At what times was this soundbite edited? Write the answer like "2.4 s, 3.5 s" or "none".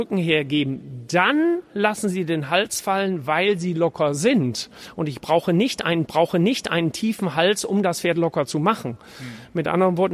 6.1 s